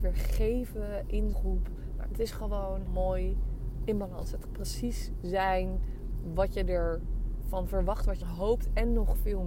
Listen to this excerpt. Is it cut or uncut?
cut